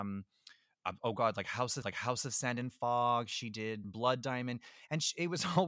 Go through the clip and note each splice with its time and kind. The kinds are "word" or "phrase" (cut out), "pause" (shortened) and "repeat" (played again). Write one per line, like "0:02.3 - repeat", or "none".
0:01.8 - repeat
0:03.8 - word